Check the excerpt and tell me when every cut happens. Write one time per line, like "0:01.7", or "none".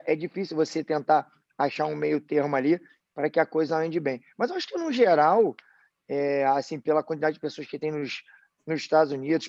none

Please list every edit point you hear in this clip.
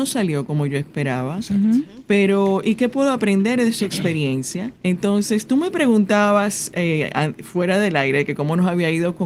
0:04.7

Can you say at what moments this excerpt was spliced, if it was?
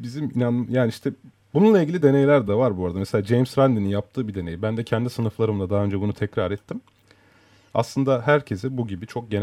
none

